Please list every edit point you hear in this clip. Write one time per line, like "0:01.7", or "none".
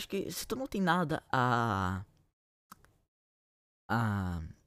none